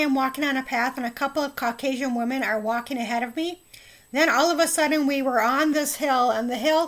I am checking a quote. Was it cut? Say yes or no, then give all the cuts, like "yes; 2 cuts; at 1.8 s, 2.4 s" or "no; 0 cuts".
no; 0 cuts